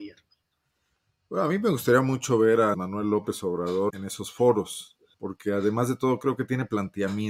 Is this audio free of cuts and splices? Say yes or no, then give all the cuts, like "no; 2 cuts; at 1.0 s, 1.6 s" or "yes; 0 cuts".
no; 3 cuts; at 2.7 s, 3.9 s, 5.1 s